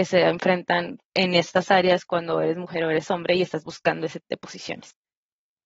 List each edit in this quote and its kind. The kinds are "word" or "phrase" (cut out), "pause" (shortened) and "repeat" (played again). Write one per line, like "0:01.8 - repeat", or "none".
0:01.0 - pause
0:04.2 - phrase